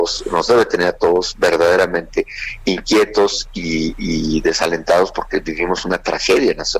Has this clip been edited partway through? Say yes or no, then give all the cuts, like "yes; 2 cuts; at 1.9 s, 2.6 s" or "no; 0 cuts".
no; 0 cuts